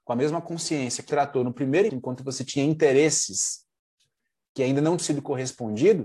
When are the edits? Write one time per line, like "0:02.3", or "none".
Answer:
0:01.1
0:01.9
0:05.0